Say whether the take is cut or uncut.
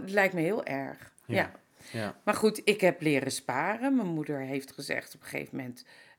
cut